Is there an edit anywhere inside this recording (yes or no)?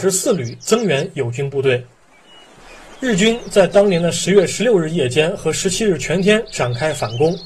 no